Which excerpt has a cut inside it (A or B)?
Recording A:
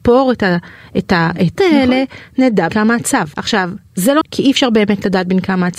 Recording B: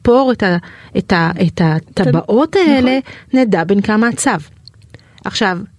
A